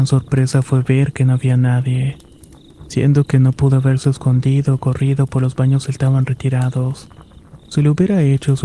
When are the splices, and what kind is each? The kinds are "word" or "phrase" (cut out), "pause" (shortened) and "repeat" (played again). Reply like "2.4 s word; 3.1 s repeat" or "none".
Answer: none